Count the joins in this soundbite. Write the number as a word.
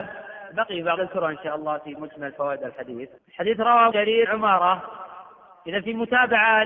five